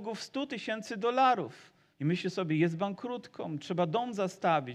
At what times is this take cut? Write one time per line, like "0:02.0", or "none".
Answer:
0:01.9